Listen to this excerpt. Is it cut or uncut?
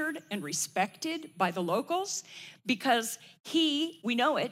uncut